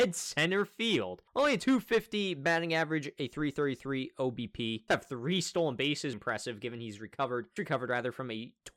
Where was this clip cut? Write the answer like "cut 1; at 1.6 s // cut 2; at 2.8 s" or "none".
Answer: cut 1; at 4.9 s // cut 2; at 6.1 s // cut 3; at 7.6 s

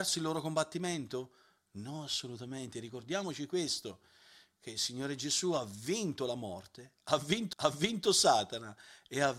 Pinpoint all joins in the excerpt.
cut 1; at 7.5 s

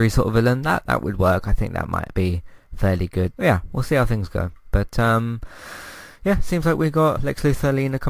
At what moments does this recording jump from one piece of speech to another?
cut 1; at 3.3 s // cut 2; at 7.2 s

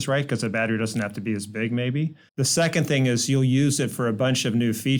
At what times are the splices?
cut 1; at 2.3 s

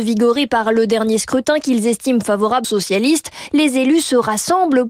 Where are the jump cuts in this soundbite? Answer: cut 1; at 2.6 s

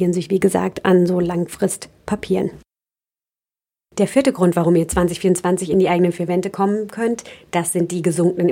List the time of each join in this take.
none

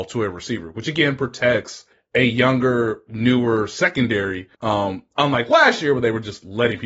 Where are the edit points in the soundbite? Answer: cut 1; at 1.9 s // cut 2; at 4.5 s

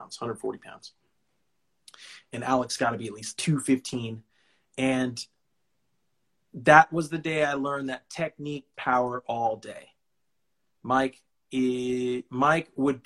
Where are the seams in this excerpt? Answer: cut 1; at 8.7 s

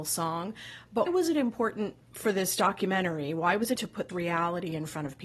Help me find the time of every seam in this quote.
cut 1; at 1.1 s // cut 2; at 2.0 s // cut 3; at 3.8 s // cut 4; at 4.1 s

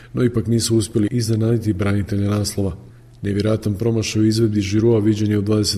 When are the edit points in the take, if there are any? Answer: none

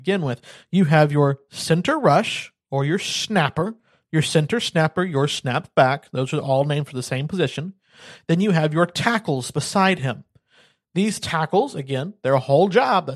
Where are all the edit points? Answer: none

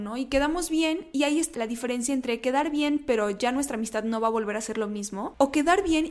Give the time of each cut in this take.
cut 1; at 1.5 s

